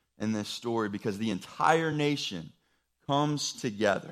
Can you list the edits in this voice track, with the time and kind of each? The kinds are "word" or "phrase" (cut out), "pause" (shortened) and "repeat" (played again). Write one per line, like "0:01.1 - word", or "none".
none